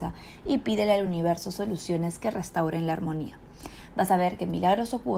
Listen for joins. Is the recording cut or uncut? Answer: uncut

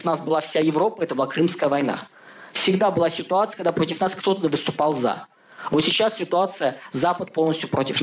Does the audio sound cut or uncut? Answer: uncut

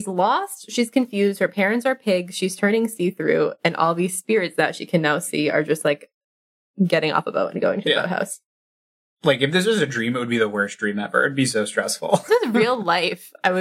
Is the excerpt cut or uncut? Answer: cut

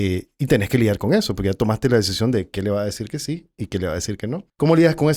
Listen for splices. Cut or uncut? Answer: uncut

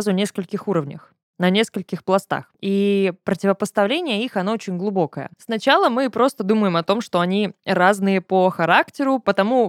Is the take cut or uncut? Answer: cut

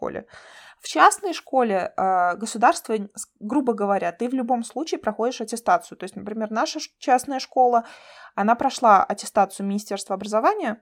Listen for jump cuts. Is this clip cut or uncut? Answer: uncut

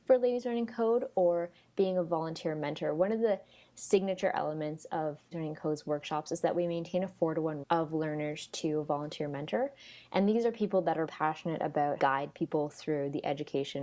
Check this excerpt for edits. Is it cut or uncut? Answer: cut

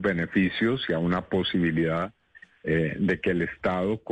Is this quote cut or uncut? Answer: uncut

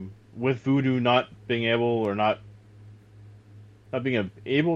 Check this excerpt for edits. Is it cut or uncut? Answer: uncut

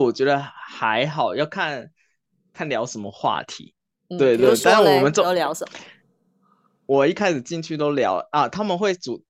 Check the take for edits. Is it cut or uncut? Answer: uncut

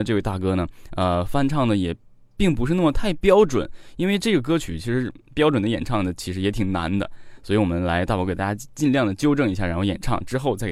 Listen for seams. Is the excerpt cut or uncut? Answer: uncut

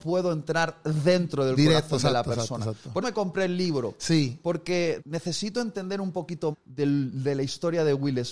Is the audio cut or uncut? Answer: cut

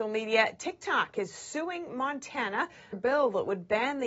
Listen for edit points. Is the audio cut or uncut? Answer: cut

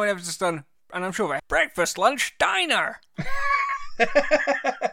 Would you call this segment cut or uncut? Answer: cut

